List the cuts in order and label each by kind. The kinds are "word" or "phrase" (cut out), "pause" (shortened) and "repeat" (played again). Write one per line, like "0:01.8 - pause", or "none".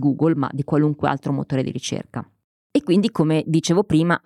none